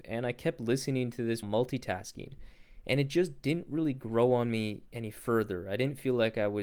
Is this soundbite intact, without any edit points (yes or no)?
no